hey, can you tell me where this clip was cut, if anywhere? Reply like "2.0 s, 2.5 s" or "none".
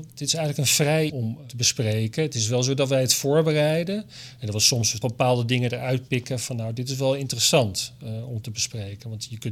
1.1 s, 5.0 s